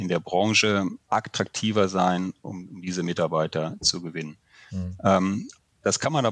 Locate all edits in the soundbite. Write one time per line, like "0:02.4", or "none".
0:01.0